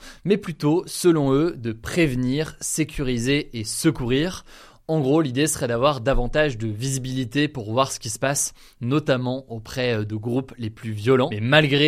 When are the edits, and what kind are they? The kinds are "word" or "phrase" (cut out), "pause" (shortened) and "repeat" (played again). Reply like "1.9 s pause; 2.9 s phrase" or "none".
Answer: none